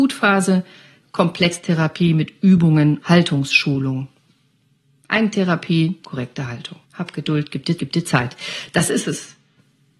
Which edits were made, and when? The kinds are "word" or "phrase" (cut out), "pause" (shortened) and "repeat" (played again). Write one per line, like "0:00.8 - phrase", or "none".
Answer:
0:01.0 - word
0:03.0 - word
0:06.0 - word
0:06.8 - pause
0:07.8 - repeat